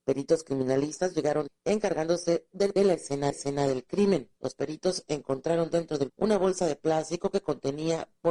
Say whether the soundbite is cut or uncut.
cut